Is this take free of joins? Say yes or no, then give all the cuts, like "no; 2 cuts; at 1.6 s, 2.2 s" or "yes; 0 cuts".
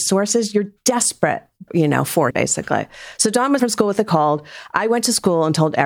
no; 3 cuts; at 1.7 s, 2.3 s, 3.6 s